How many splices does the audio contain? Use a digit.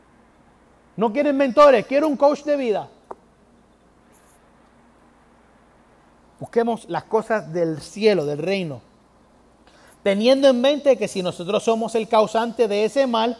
0